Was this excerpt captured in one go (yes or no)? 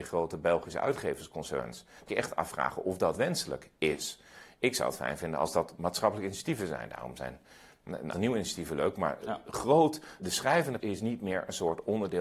no